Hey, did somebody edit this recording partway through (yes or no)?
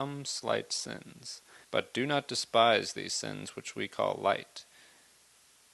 yes